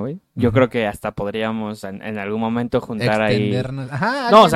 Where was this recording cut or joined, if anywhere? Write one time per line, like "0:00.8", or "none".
none